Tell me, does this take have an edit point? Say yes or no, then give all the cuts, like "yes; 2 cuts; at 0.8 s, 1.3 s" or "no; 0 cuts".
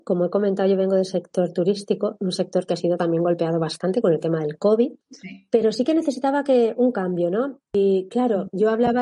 yes; 1 cut; at 5.0 s